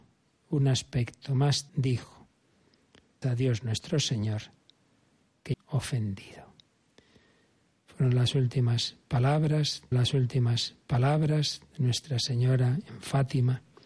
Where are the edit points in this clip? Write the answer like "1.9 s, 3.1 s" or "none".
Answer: 1.7 s, 3.2 s, 5.5 s, 9.9 s